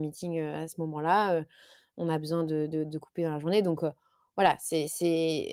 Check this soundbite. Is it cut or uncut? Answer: uncut